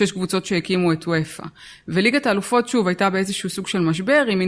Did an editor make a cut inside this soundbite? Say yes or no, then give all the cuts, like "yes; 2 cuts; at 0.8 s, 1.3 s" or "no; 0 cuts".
no; 0 cuts